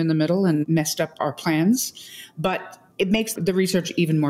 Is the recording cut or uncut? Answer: uncut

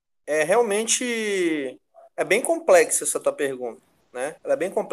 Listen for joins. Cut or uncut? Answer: uncut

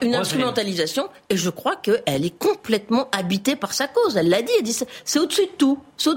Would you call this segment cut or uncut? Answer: uncut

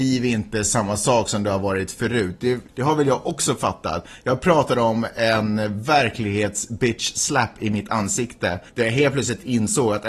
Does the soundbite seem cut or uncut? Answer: cut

